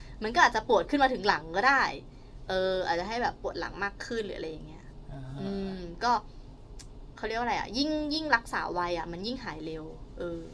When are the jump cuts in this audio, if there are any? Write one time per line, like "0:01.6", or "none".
none